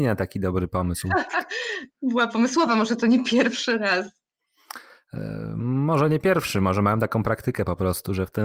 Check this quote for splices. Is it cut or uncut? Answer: uncut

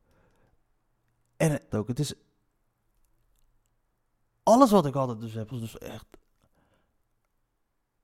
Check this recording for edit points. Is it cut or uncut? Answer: cut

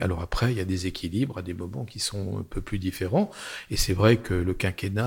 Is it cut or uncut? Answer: uncut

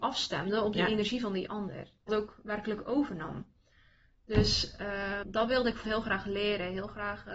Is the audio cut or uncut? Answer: cut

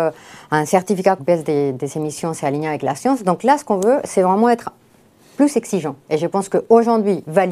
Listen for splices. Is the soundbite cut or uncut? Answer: cut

